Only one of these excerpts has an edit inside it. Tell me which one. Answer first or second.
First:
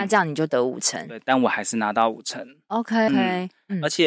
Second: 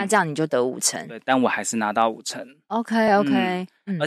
first